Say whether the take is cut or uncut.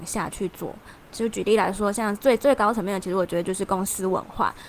uncut